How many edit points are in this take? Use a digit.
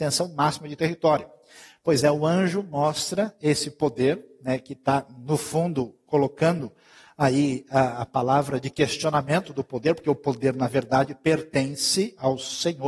0